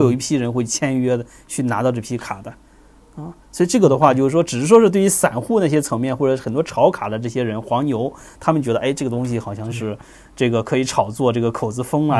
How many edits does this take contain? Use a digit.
0